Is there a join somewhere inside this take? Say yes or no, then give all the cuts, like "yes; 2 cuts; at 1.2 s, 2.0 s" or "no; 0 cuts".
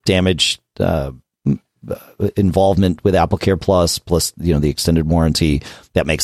no; 0 cuts